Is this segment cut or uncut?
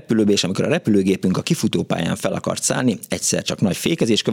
uncut